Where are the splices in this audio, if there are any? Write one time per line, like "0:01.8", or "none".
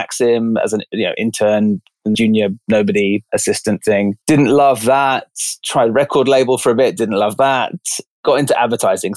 0:02.1
0:04.2